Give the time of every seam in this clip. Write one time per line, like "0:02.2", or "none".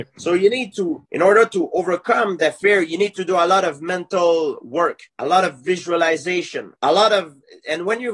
0:01.0
0:05.1
0:06.8